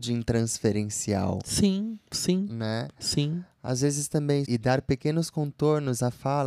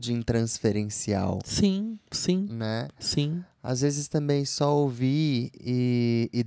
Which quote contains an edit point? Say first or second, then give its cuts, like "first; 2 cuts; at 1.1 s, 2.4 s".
first; 1 cut; at 4.4 s